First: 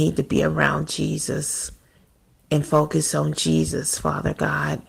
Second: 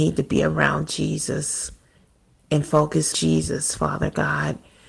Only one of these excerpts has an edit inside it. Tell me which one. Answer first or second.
second